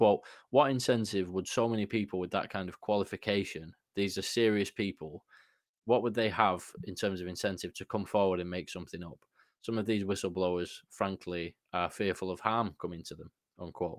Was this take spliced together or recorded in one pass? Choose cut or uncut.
uncut